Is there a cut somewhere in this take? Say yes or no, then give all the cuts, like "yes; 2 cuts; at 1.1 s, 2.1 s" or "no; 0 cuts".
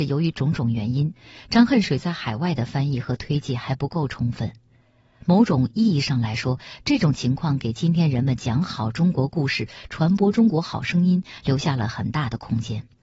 no; 0 cuts